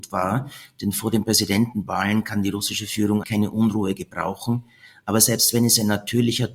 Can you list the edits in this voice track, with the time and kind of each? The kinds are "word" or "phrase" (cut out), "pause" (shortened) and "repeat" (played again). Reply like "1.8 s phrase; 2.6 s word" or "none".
3.2 s word